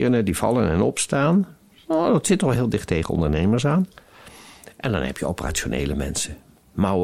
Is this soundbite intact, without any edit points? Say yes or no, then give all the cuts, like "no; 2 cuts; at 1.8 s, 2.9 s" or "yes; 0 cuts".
yes; 0 cuts